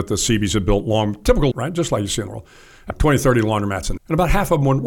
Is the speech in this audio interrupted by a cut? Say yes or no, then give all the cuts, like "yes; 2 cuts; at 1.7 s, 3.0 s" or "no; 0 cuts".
yes; 4 cuts; at 1.5 s, 2.3 s, 2.9 s, 4.0 s